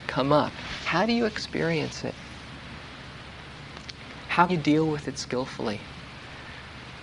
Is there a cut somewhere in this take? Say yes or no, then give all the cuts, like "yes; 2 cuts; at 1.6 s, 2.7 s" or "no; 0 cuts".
yes; 1 cut; at 4.5 s